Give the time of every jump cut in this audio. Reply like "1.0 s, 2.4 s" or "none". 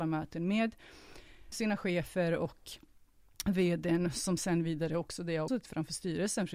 1.5 s, 5.5 s